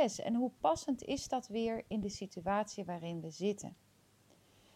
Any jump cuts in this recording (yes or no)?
no